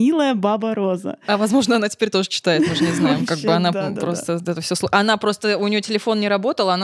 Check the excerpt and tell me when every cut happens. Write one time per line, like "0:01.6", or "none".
none